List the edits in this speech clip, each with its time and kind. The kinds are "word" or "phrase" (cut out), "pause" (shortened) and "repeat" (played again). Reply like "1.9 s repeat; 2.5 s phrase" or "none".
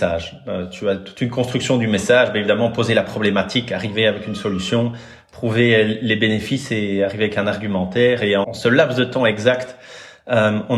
8.4 s word